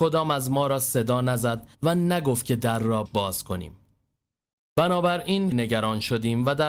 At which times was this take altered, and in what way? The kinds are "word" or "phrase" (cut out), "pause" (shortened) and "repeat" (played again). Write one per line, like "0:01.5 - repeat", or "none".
0:01.7 - pause
0:03.1 - word
0:05.5 - word